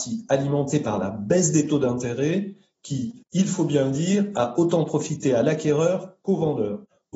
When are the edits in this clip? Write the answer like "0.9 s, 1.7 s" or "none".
none

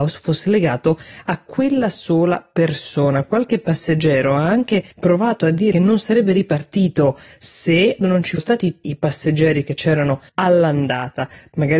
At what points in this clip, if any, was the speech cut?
4.9 s, 5.7 s, 8.0 s, 8.4 s, 8.8 s, 10.3 s

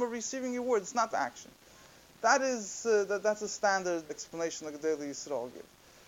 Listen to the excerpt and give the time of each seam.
1.1 s, 4.1 s

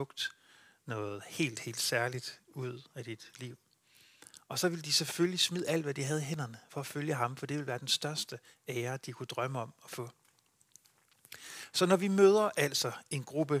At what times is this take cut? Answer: none

